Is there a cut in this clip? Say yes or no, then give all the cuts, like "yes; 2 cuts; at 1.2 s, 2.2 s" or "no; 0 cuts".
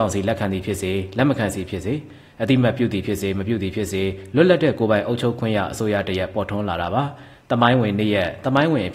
no; 0 cuts